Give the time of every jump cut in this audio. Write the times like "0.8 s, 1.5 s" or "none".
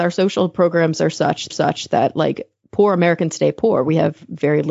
1.5 s